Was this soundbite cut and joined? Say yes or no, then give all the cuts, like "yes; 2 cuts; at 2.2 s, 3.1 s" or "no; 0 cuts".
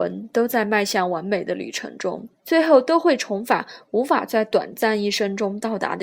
yes; 1 cut; at 2.4 s